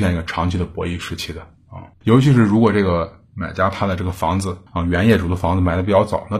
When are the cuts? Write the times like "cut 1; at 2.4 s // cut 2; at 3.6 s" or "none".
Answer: cut 1; at 1.9 s // cut 2; at 4.7 s